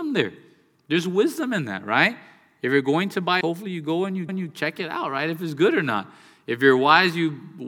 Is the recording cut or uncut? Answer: cut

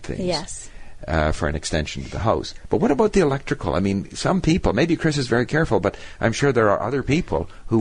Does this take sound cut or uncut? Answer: uncut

